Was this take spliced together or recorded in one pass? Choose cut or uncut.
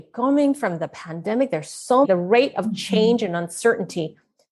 cut